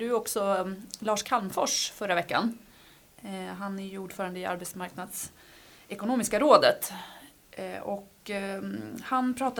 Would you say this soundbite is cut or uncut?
uncut